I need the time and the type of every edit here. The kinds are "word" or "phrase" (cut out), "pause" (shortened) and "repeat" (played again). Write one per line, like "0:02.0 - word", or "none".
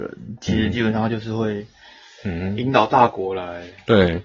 none